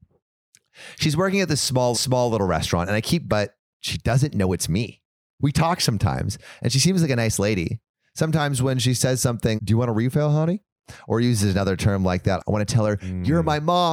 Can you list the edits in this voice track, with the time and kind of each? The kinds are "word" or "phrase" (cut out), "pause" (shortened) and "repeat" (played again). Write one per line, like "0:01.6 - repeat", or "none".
0:01.9 - repeat
0:03.3 - word
0:09.6 - word